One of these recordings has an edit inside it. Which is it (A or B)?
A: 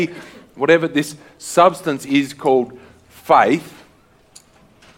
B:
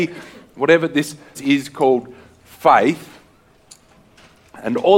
B